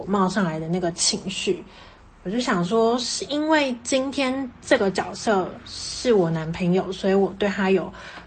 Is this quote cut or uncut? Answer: uncut